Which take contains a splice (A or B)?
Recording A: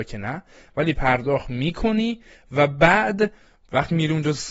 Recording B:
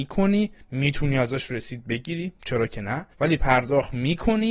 B